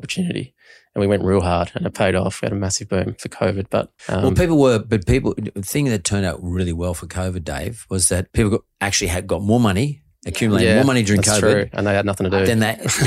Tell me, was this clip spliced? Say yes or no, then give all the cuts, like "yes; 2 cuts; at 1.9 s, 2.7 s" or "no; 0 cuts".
yes; 2 cuts; at 4.0 s, 8.3 s